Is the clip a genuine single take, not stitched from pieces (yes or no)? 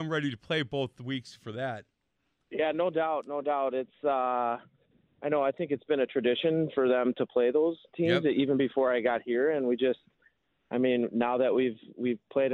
yes